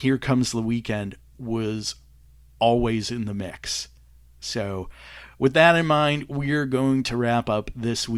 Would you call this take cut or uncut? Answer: uncut